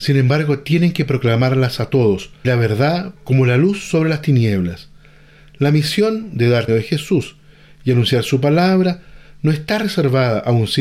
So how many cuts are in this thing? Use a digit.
3